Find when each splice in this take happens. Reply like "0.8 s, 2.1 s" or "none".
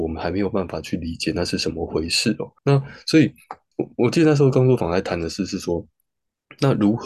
2.6 s, 3.7 s